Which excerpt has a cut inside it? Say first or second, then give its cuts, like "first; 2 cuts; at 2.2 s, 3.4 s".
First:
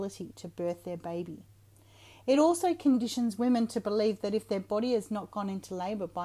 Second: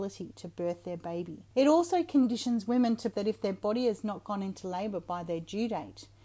second; 2 cuts; at 1.5 s, 3.1 s